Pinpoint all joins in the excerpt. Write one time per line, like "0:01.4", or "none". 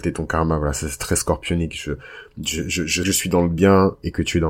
0:03.0